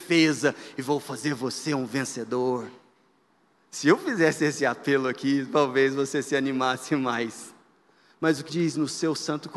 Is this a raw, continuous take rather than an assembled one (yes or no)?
no